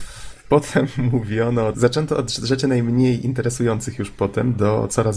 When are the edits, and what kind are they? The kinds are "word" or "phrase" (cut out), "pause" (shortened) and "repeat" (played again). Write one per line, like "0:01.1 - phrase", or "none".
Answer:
0:01.7 - word